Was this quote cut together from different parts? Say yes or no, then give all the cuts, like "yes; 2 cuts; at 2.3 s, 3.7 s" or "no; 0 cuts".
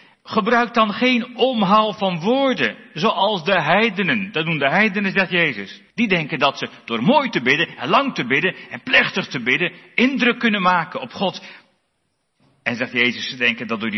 yes; 2 cuts; at 5.9 s, 12.4 s